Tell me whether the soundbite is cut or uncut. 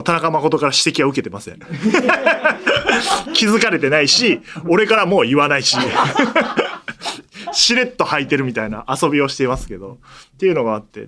uncut